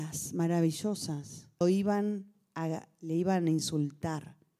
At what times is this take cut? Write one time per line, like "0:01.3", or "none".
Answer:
0:01.6